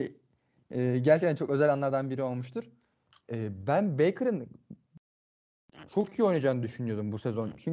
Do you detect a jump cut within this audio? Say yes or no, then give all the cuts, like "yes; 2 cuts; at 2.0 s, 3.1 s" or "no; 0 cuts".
no; 0 cuts